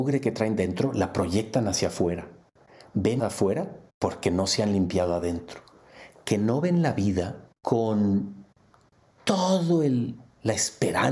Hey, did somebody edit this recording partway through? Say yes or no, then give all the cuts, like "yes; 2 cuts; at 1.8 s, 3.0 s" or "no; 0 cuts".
yes; 3 cuts; at 3.2 s, 3.9 s, 7.6 s